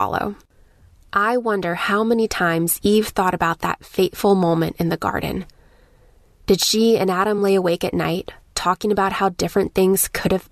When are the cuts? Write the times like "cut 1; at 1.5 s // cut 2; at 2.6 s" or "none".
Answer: none